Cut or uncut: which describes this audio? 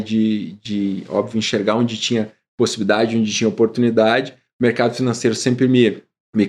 uncut